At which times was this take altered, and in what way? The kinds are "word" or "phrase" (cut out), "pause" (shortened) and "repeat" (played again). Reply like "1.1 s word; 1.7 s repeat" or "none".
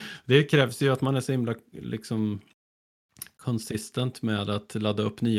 none